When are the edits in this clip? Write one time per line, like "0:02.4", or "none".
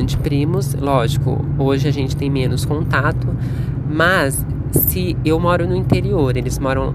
none